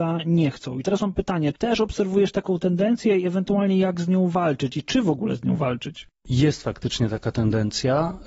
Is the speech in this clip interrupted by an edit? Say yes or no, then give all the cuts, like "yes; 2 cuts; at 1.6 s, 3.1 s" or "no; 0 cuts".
yes; 1 cut; at 1.5 s